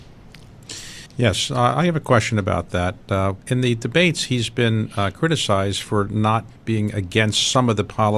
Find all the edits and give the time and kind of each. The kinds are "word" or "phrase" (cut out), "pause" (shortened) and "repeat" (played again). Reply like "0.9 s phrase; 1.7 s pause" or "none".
1.1 s pause; 3.4 s pause; 6.6 s pause